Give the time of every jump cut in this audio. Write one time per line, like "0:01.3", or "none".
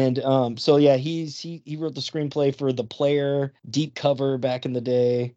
0:03.6

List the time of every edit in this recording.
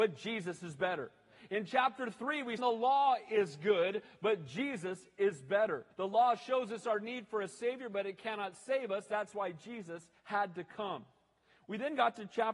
0:02.6
0:05.9
0:10.2

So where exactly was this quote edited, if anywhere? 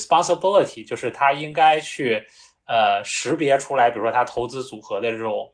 none

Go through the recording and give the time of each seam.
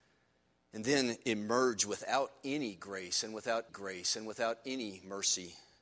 0:03.7

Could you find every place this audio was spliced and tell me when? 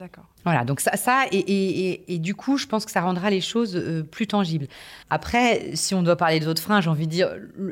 0:05.0

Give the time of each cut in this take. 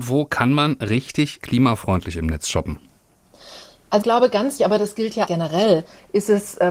0:01.4
0:04.0
0:04.6
0:05.2

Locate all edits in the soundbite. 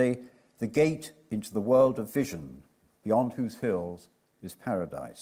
none

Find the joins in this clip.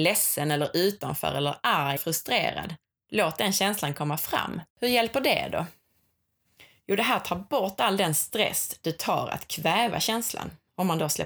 0:02.0
0:04.7

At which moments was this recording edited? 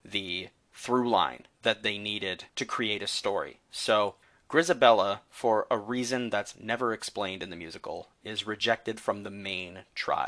0:01.5
0:02.5
0:04.2

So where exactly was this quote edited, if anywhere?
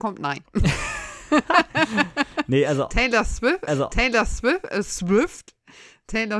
0:03.7

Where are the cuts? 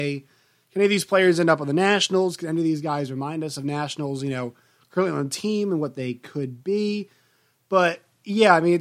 none

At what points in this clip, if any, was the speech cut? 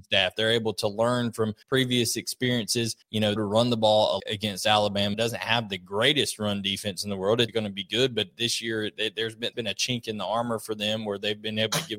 0:01.6
0:03.0
0:03.4
0:04.2
0:05.1
0:07.5
0:09.5

